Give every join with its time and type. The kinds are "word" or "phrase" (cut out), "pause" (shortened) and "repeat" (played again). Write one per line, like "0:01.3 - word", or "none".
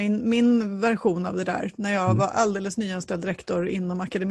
none